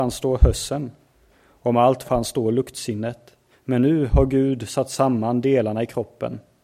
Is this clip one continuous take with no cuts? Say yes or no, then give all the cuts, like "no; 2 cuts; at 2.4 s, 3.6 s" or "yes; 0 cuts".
no; 2 cuts; at 2.0 s, 3.5 s